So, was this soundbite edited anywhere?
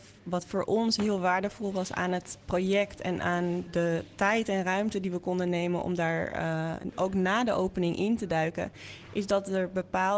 no; 0 cuts

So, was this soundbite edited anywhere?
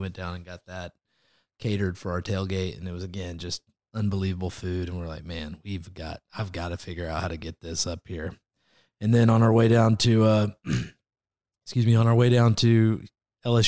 no; 0 cuts

